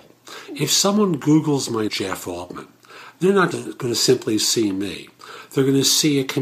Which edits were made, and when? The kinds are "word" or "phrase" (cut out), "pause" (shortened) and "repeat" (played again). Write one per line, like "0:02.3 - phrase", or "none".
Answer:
0:01.9 - word
0:03.5 - word